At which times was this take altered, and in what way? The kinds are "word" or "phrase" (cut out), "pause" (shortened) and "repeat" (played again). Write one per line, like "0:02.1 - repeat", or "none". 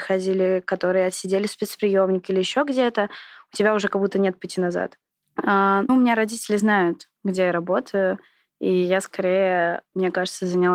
0:05.9 - word